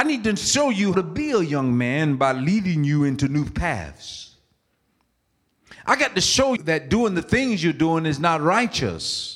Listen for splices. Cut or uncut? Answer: cut